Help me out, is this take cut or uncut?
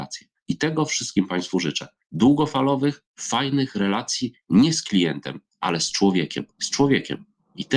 cut